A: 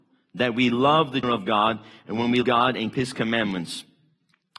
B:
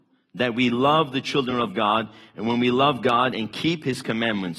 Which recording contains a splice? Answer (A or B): A